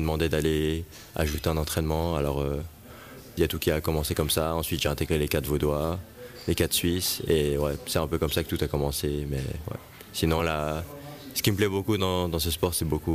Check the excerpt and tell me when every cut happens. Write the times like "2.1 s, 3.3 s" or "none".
none